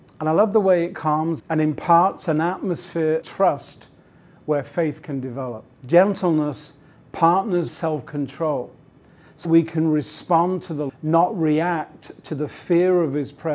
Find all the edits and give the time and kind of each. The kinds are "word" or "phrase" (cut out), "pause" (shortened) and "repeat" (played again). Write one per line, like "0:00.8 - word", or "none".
0:01.4 - phrase
0:03.2 - word
0:05.7 - pause
0:07.7 - word
0:09.4 - word
0:10.9 - word